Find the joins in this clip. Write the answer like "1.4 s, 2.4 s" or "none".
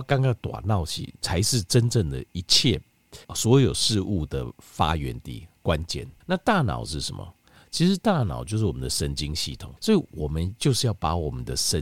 3.2 s, 6.2 s, 9.8 s